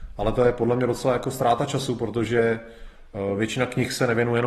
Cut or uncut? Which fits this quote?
uncut